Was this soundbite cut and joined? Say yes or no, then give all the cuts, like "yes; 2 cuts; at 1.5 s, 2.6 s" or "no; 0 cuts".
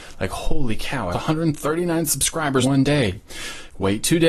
yes; 2 cuts; at 1.1 s, 2.6 s